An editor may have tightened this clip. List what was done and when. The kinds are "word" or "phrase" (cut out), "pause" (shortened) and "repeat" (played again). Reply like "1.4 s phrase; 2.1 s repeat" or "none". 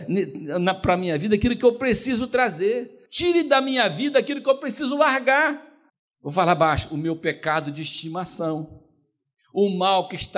3.1 s pause; 5.9 s pause